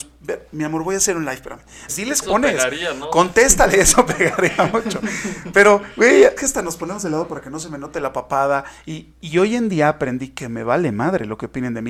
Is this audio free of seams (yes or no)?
no